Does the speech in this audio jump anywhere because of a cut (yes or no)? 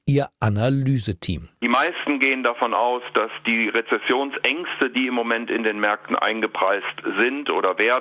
no